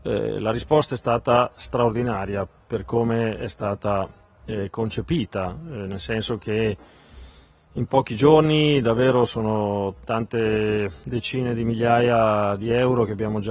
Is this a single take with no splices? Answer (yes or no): yes